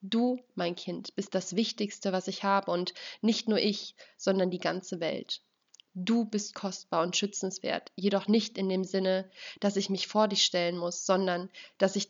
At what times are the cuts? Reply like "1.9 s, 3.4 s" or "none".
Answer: none

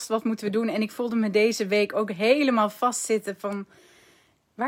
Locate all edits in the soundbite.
none

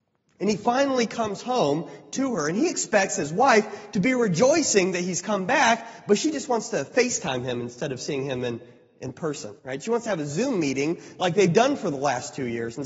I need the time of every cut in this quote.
9.6 s

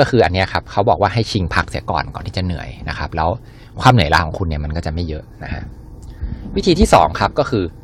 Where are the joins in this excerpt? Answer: none

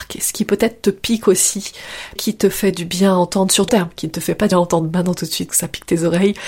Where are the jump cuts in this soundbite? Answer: 2.2 s, 3.7 s, 4.5 s, 5.5 s

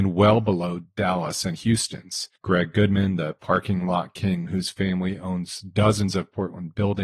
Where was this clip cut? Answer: 2.4 s

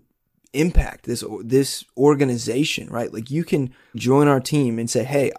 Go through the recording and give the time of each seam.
3.9 s

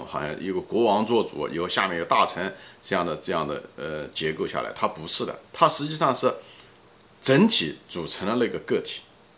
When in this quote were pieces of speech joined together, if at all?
5.5 s

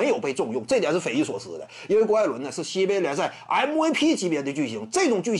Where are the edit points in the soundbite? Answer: none

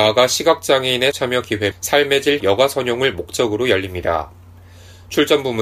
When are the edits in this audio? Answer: 1.1 s, 1.7 s, 2.4 s

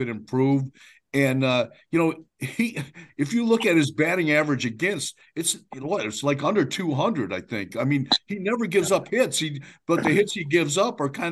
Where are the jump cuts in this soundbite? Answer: 2.3 s

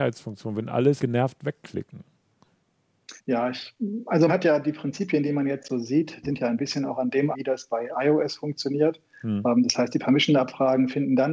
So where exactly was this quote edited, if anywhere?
1.0 s, 3.2 s, 4.3 s, 6.2 s, 7.3 s

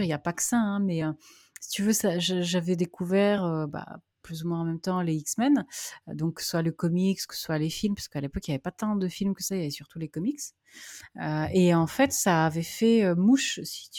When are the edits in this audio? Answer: none

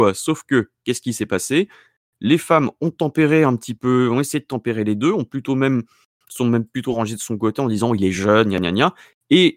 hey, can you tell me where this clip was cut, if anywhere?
none

